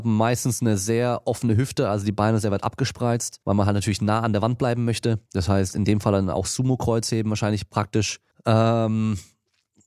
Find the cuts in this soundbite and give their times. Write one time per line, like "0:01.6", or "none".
0:03.4
0:05.3
0:08.3